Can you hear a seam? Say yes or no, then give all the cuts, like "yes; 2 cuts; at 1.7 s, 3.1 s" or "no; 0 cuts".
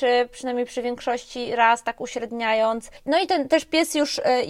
no; 0 cuts